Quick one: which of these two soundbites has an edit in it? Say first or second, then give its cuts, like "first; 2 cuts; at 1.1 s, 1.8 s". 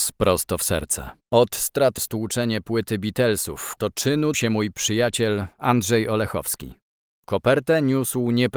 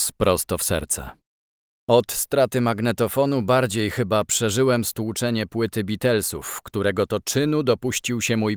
first; 4 cuts; at 1.2 s, 2.0 s, 3.8 s, 4.3 s